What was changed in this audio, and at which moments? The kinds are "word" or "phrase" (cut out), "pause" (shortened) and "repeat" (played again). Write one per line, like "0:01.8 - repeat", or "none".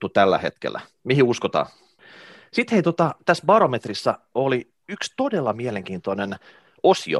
none